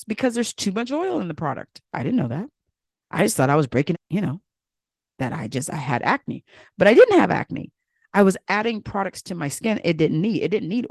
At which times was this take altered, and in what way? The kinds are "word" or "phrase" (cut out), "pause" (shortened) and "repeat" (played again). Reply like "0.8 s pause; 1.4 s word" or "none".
3.9 s word